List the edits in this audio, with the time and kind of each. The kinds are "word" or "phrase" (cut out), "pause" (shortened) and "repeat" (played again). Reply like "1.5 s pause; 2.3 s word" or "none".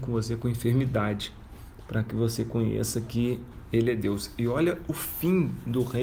none